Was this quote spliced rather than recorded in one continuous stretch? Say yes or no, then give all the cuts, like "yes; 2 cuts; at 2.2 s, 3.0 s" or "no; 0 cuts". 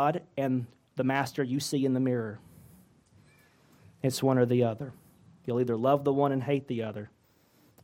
no; 0 cuts